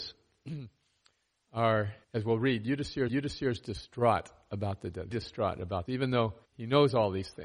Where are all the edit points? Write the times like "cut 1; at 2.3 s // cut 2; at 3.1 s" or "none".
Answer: cut 1; at 2.0 s // cut 2; at 3.1 s // cut 3; at 5.1 s // cut 4; at 5.9 s // cut 5; at 6.4 s